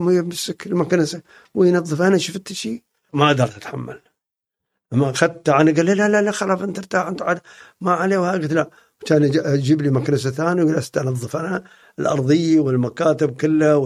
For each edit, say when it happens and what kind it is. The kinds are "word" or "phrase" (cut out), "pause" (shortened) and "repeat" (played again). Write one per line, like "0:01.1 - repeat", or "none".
0:03.1 - word